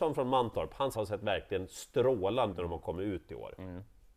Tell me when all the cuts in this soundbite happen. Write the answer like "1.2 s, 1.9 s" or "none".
0.9 s, 2.5 s